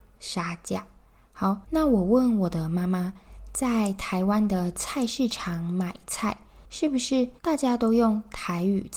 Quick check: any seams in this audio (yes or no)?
yes